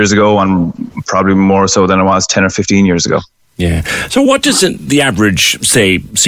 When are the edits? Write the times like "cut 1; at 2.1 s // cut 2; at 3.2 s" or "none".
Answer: none